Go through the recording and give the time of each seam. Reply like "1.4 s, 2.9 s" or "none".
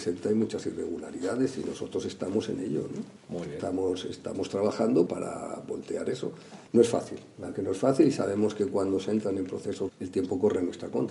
3.2 s, 5.1 s, 6.7 s, 7.5 s, 9.9 s